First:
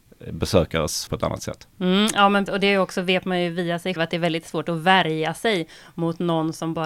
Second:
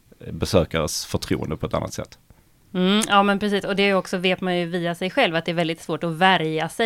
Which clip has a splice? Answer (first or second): first